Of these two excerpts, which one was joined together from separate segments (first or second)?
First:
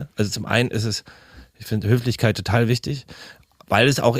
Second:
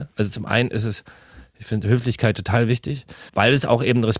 second